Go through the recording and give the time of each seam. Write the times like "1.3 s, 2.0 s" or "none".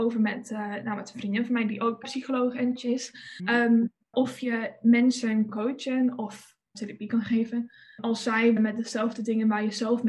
2.0 s, 2.8 s, 3.4 s, 4.1 s, 5.5 s, 6.7 s, 8.0 s, 8.6 s